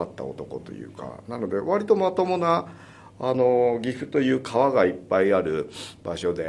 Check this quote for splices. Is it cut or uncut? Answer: uncut